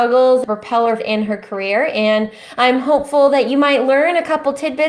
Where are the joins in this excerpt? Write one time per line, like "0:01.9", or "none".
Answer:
0:01.0